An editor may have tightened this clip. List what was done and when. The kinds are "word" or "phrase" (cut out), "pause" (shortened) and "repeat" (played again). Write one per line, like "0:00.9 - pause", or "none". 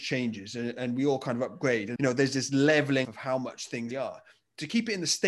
0:02.0 - word
0:03.0 - word
0:03.9 - word